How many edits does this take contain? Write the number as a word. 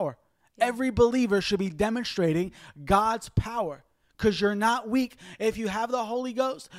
zero